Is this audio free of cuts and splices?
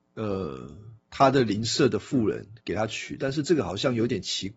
no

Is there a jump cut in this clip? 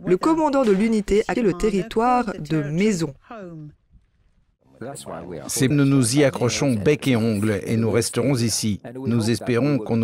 yes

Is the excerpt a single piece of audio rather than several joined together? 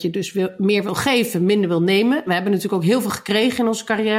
yes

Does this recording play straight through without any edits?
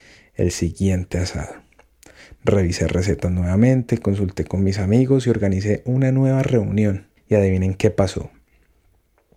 no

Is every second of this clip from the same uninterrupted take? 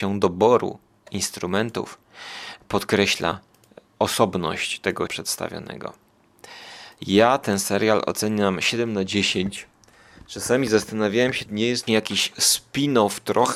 no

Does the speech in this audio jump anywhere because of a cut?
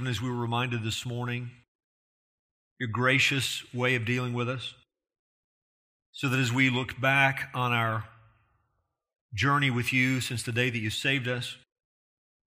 no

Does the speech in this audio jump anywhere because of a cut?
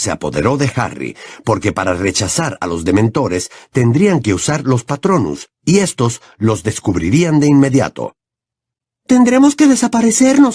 no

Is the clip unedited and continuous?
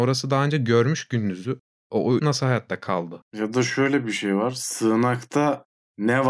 no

